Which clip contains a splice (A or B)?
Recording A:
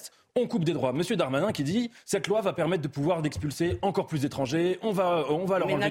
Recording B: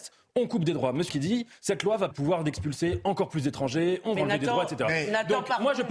B